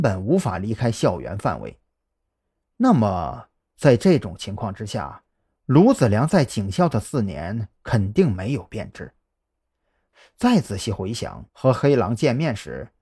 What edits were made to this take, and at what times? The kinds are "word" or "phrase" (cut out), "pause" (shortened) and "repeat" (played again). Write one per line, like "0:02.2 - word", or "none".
0:11.5 - pause